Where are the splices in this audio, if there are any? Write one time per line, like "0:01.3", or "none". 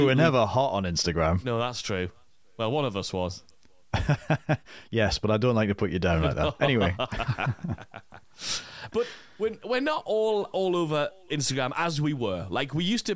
none

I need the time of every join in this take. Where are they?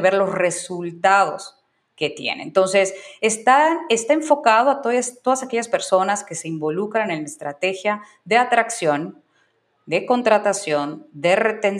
none

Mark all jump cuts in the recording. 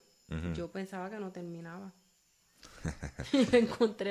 none

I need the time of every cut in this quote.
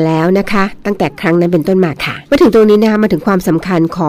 0:02.3

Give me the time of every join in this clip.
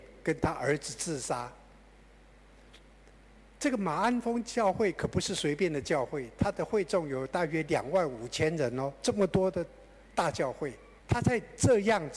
0:11.0

